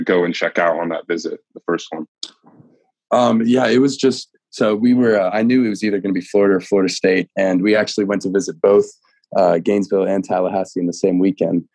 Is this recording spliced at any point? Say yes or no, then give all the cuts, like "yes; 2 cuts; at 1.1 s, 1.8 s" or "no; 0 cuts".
no; 0 cuts